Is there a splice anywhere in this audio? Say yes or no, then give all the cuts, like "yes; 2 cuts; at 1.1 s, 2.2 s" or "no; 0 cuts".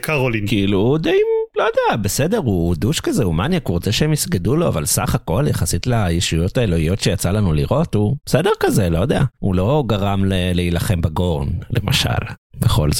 no; 0 cuts